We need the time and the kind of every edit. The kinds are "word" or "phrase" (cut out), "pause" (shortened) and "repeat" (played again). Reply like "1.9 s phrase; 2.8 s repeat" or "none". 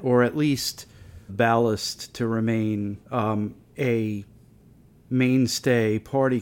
1.3 s phrase; 3.0 s pause

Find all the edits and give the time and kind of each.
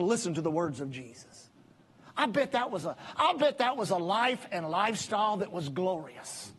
none

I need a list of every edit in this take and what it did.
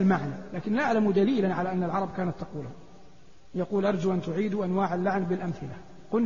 none

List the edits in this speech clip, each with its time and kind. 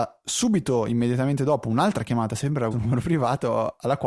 2.7 s word

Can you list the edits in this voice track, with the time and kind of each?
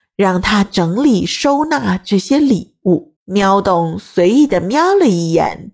3.2 s pause

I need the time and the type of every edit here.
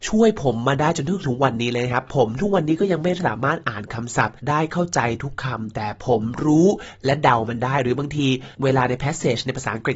4.4 s pause; 8.5 s pause

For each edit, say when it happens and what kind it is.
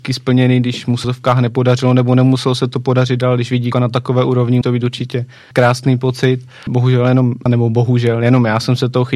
1.0 s word; 3.7 s word; 4.6 s word; 5.5 s word; 6.7 s word; 7.5 s word

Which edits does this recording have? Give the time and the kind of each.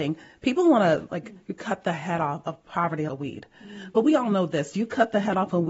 3.1 s word; 3.5 s pause

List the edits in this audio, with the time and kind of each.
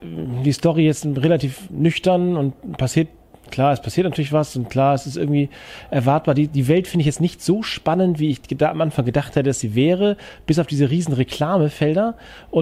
none

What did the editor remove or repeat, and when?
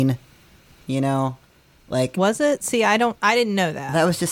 none

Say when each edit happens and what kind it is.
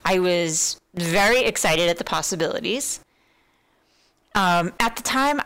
none

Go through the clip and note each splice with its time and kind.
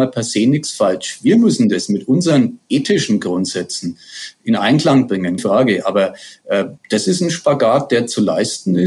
5.4 s word; 6.8 s pause

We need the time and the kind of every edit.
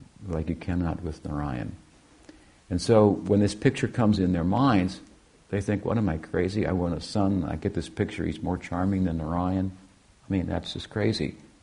none

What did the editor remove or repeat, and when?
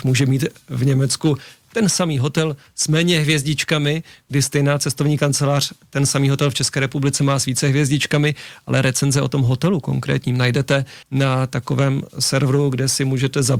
11.0 s pause

